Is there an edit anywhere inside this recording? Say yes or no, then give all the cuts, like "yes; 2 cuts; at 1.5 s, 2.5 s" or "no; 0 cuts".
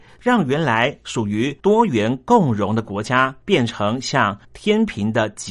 yes; 3 cuts; at 1.6 s, 3.4 s, 4.4 s